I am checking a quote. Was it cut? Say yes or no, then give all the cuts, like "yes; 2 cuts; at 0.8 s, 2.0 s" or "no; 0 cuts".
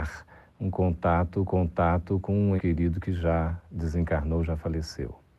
yes; 2 cuts; at 1.5 s, 2.6 s